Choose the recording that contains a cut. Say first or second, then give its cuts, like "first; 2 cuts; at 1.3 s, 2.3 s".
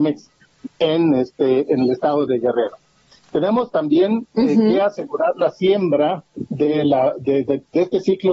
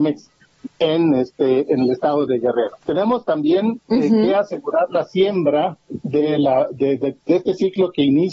second; 1 cut; at 2.8 s